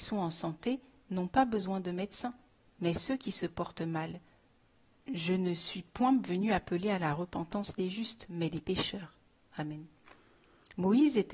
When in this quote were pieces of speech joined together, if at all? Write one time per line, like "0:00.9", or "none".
none